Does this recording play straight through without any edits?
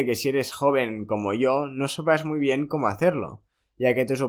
yes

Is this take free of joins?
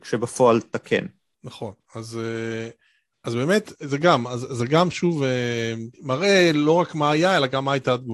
no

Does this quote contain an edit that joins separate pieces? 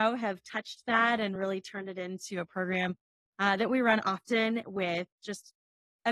no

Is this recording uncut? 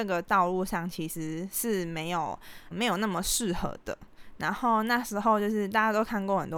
no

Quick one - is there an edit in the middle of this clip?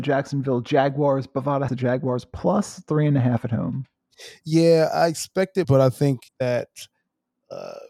yes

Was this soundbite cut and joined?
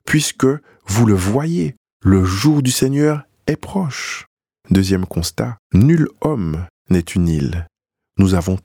yes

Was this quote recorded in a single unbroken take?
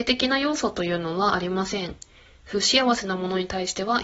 yes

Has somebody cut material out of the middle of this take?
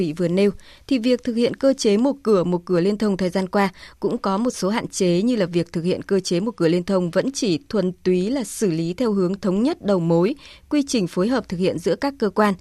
no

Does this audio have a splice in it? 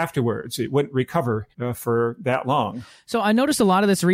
yes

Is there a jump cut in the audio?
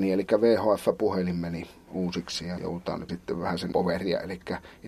yes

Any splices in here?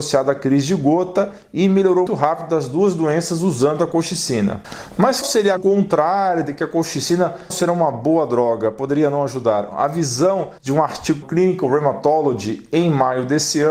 yes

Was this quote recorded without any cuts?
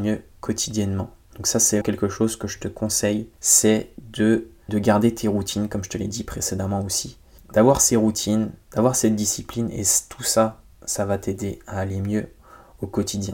no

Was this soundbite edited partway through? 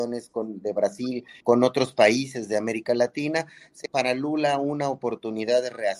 yes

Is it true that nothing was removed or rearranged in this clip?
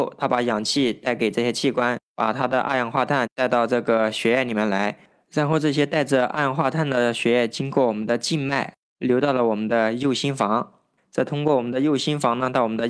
yes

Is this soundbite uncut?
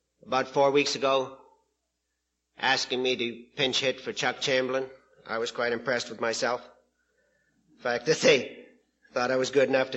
yes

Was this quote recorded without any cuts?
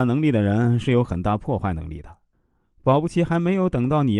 yes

